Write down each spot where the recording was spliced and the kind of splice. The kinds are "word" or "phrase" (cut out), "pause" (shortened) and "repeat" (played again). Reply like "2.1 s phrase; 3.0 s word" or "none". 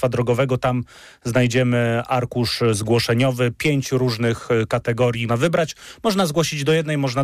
5.3 s word